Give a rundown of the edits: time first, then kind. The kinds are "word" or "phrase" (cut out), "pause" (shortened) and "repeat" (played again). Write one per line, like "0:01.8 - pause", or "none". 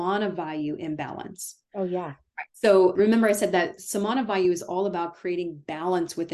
0:02.5 - pause